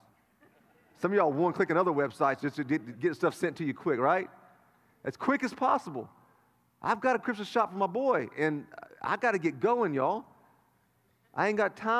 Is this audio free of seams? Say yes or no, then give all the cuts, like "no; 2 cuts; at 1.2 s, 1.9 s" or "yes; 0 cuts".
yes; 0 cuts